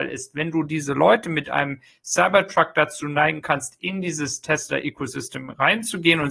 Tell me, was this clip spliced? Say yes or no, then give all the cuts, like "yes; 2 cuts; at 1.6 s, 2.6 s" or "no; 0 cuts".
no; 0 cuts